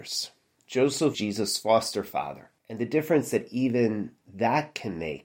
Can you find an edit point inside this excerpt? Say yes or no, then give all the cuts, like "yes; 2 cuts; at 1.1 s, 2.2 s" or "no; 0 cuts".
yes; 2 cuts; at 1.1 s, 2.6 s